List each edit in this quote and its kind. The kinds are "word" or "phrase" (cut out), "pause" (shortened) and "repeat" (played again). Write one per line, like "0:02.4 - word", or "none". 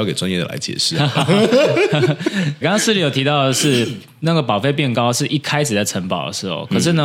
0:02.6 - word